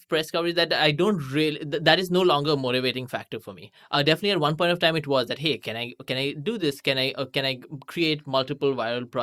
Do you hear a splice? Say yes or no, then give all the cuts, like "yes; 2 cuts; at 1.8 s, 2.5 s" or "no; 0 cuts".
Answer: no; 0 cuts